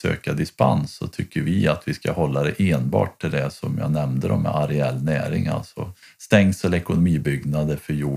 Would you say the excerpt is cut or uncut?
cut